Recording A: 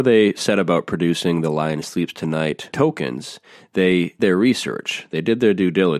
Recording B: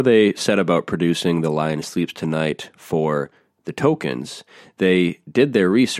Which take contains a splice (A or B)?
A